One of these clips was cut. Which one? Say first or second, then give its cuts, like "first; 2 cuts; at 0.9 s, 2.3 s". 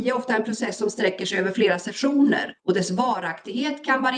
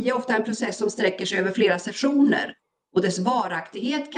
first; 1 cut; at 2.6 s